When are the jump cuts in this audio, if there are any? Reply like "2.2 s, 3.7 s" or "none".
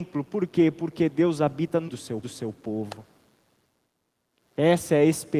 1.9 s, 2.2 s